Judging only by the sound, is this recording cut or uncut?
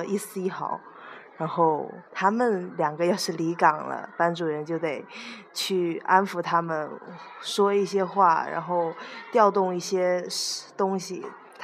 cut